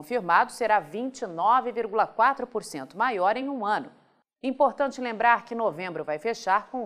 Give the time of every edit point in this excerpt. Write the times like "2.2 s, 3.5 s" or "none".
none